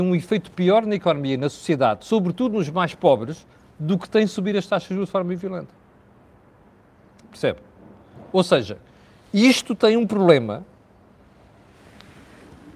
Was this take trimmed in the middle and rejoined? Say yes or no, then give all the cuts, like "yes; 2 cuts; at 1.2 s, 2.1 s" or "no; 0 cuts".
no; 0 cuts